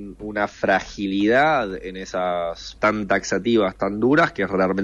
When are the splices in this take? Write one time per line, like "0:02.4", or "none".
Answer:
0:02.8